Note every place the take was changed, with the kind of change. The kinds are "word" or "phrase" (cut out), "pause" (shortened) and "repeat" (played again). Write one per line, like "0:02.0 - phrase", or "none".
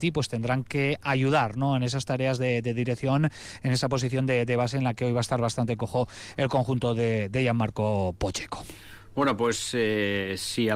none